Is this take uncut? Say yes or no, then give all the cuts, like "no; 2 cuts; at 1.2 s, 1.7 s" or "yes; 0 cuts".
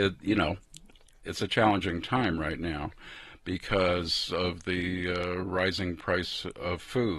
yes; 0 cuts